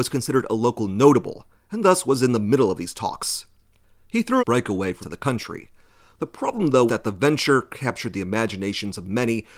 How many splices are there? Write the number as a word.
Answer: three